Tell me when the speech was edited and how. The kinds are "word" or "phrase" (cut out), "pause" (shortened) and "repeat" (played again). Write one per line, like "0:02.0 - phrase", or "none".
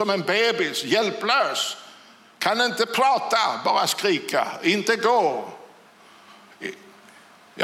none